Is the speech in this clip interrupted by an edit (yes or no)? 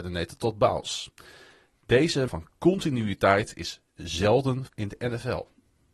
yes